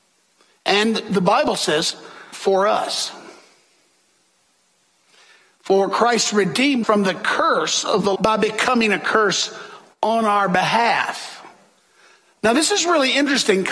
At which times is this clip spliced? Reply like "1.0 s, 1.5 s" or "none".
2.3 s, 6.8 s, 8.2 s